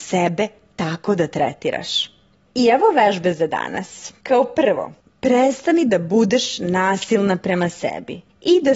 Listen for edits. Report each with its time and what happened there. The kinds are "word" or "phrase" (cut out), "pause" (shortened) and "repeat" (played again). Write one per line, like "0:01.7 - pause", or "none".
none

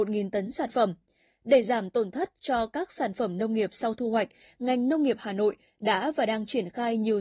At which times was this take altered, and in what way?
none

